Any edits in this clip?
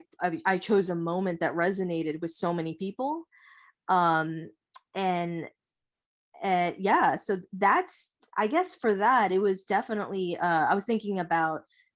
no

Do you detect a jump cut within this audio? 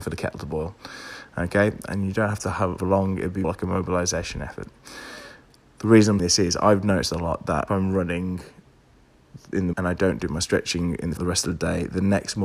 yes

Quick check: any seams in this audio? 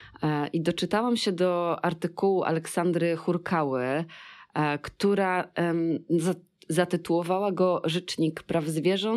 no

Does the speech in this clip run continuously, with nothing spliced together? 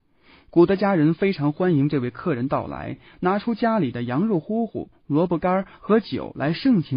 yes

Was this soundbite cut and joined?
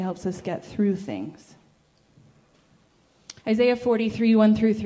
yes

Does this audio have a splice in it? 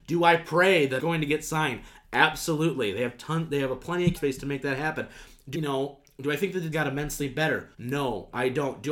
yes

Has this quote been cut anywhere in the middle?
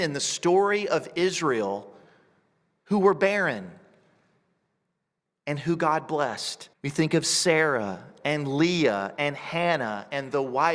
yes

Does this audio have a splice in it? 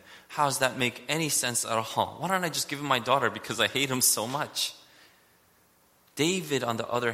no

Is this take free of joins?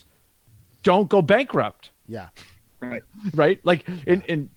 no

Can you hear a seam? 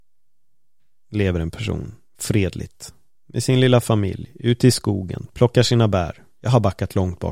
no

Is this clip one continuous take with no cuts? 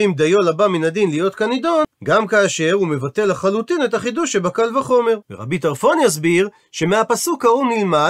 no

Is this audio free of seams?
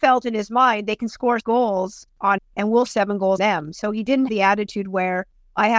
no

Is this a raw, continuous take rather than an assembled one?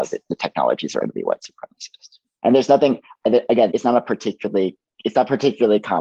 no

